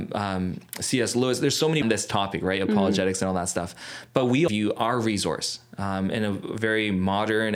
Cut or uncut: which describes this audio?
cut